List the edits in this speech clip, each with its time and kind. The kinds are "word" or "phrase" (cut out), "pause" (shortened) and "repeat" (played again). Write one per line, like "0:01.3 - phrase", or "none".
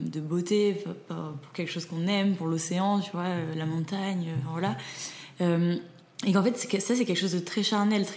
none